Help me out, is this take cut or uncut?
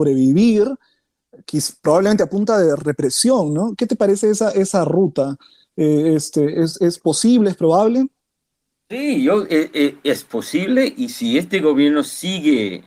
uncut